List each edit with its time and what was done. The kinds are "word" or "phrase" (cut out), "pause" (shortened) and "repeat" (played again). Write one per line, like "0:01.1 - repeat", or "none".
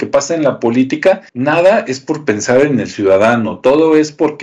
0:01.3 - pause